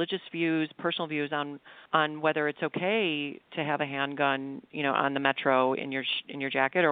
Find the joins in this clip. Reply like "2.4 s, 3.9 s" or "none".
1.9 s